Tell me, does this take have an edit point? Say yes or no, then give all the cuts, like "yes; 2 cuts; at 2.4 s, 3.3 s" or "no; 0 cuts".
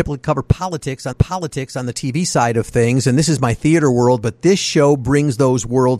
yes; 1 cut; at 1.1 s